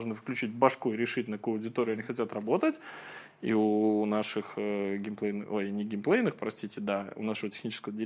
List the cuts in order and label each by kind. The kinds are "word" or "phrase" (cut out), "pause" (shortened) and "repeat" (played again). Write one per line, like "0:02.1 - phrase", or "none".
none